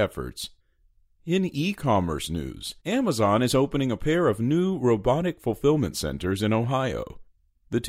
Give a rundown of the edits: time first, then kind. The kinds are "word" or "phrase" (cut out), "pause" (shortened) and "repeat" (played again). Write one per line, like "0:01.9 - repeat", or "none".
0:02.8 - pause

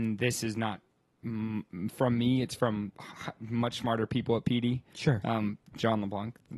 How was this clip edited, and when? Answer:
0:02.9 - word

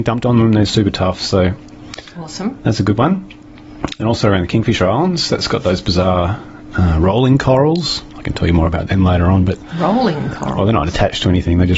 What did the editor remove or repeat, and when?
none

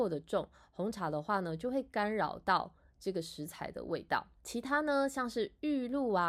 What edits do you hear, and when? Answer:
0:04.4 - pause

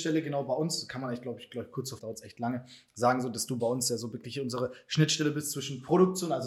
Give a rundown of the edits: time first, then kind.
0:02.0 - phrase

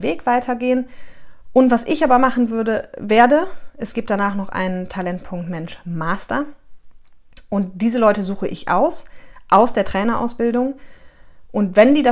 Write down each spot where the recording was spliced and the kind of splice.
none

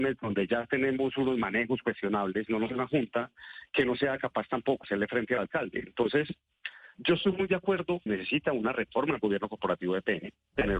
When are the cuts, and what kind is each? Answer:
0:02.7 - word
0:04.8 - word
0:08.1 - phrase

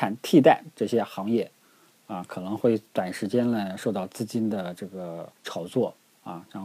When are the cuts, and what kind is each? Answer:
0:05.4 - pause

